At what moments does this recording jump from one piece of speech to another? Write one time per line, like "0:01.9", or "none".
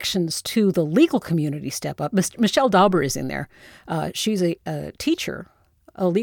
none